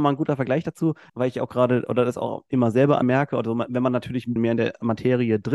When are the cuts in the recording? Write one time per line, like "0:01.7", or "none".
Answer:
0:01.1
0:03.0
0:04.4